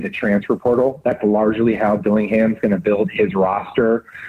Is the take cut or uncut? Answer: uncut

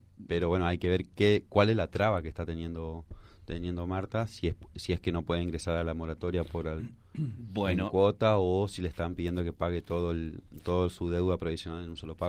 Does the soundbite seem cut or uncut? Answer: uncut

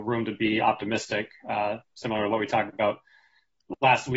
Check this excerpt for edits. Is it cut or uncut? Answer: uncut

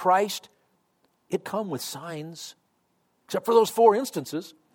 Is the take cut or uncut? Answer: cut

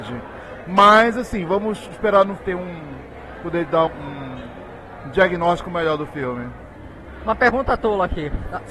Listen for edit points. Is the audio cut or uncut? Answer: cut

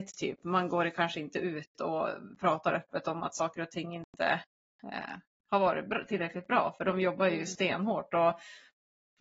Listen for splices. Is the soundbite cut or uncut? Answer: uncut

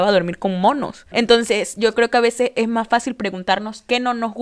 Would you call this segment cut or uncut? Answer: uncut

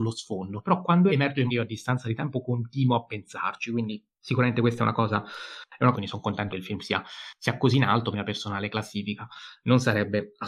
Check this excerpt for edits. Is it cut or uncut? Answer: cut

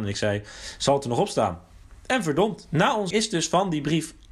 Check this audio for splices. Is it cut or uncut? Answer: cut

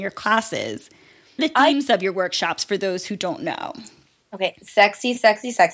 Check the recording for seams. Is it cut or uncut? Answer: cut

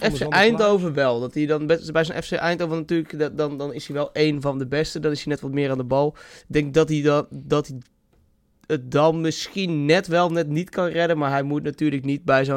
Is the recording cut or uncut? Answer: uncut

